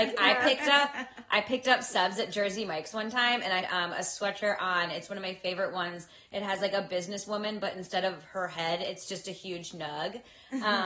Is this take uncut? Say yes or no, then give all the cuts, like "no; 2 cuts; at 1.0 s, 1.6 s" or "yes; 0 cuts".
no; 1 cut; at 3.6 s